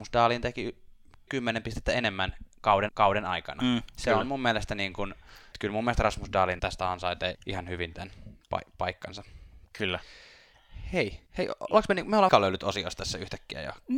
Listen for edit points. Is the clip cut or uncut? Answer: cut